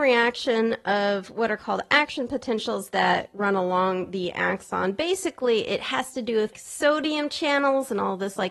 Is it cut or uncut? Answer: cut